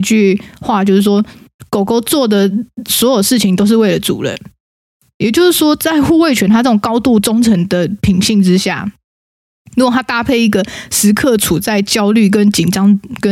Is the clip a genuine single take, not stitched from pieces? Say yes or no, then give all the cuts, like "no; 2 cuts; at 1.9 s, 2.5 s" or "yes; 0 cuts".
yes; 0 cuts